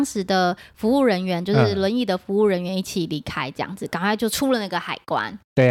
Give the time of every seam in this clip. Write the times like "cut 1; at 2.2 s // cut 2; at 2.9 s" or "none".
none